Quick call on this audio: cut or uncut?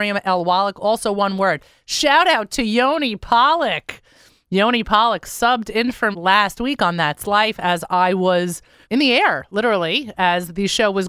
cut